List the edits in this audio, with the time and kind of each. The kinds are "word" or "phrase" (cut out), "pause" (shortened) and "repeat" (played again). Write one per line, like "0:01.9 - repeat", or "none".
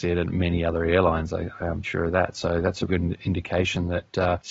0:01.8 - word
0:02.9 - word